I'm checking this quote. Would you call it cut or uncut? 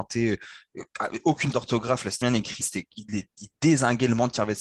cut